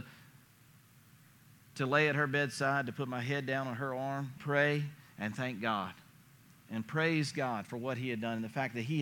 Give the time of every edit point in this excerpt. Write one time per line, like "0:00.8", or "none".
0:04.4